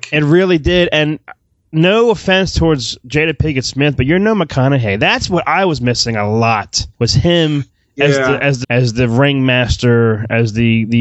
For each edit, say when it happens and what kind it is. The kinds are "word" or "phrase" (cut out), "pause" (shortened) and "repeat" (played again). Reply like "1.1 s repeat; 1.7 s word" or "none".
6.9 s pause; 8.6 s word